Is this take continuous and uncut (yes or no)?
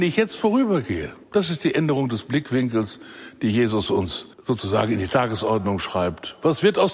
no